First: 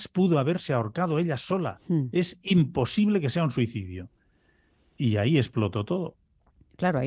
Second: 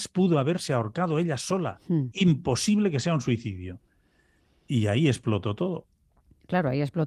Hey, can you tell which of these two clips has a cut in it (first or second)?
second